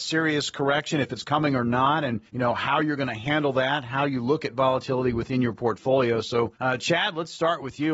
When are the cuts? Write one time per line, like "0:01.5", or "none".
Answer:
0:02.3
0:06.6